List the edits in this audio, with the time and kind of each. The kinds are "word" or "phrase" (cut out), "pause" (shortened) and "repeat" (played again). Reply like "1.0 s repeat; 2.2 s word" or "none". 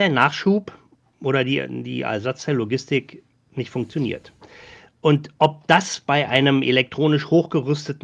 none

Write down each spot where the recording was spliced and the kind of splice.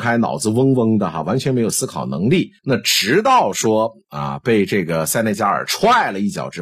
2.6 s pause

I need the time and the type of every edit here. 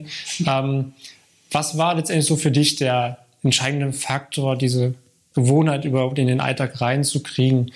none

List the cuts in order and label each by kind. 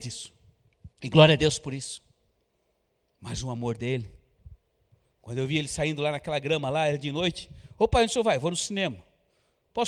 0.9 s pause

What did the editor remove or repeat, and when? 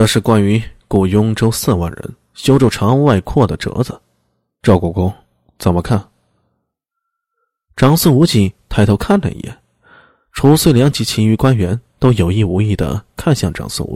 none

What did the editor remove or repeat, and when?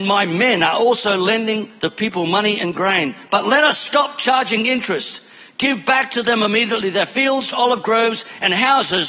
7.5 s word

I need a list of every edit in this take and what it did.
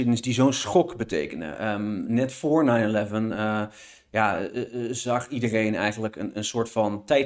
none

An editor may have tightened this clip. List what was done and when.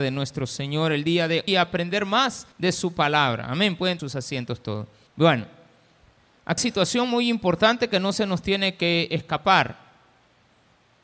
1.5 s word; 2.5 s pause; 4.0 s word; 5.1 s pause; 6.6 s phrase

